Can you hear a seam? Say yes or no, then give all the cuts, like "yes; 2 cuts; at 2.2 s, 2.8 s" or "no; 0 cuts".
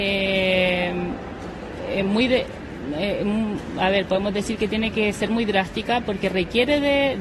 no; 0 cuts